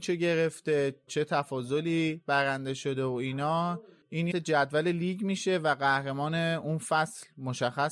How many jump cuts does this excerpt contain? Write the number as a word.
two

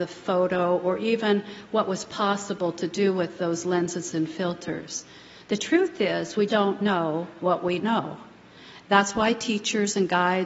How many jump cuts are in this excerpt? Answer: two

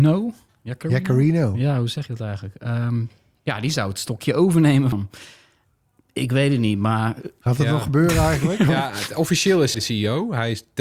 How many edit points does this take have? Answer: two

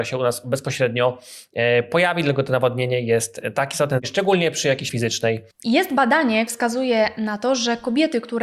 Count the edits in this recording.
two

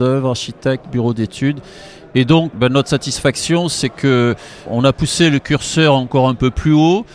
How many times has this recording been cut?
two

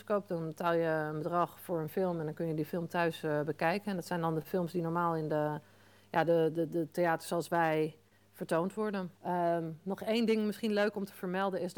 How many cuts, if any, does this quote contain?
one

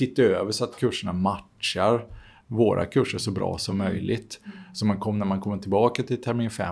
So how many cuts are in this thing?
zero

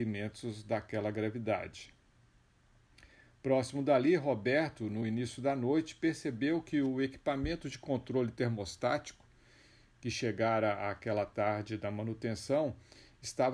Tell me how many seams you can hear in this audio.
zero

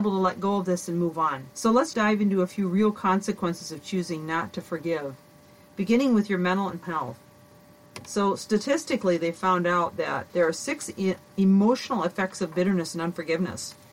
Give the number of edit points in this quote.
four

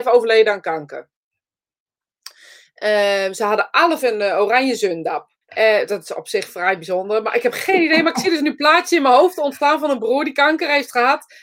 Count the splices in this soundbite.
two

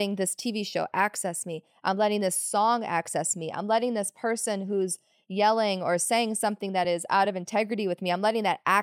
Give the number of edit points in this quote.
zero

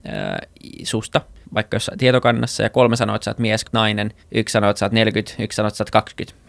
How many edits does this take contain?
three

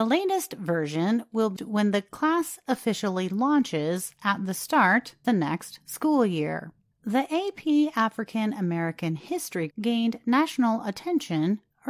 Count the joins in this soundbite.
four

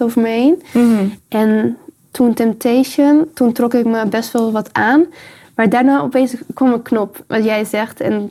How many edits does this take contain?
zero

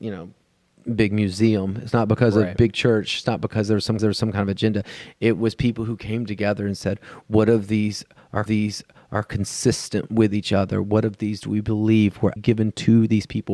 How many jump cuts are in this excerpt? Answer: three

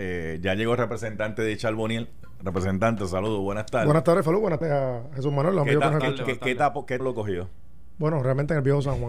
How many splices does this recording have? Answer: two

